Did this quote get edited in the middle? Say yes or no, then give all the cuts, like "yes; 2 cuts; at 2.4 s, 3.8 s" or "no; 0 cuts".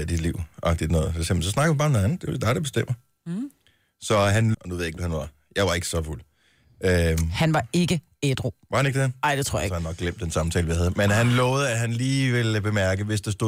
yes; 2 cuts; at 4.5 s, 5.0 s